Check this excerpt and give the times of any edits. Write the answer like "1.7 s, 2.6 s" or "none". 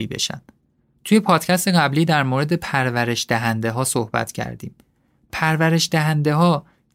none